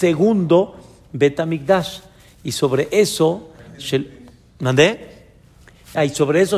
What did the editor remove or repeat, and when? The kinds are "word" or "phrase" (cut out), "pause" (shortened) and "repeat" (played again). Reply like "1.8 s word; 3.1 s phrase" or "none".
none